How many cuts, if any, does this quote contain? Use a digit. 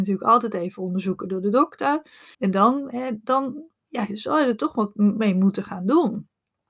1